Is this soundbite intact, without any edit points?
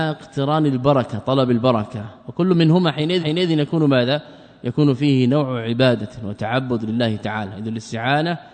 no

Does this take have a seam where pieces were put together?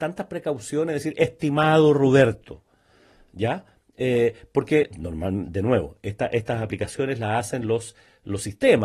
no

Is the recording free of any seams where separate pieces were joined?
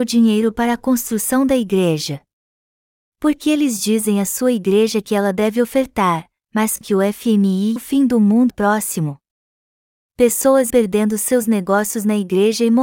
no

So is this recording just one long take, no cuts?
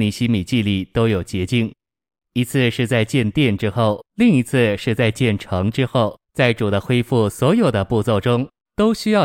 no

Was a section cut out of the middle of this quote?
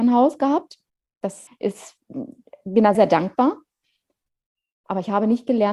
yes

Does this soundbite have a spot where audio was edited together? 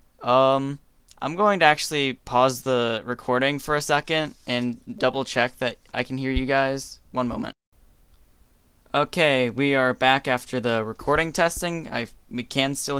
no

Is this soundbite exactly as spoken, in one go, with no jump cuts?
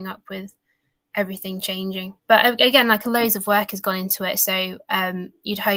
no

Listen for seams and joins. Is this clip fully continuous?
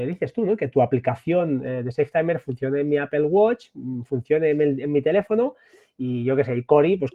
yes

